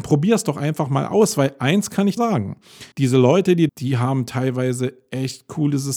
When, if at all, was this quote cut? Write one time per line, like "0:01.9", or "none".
0:02.2
0:02.9
0:03.7